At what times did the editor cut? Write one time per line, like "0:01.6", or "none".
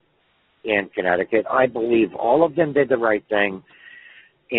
none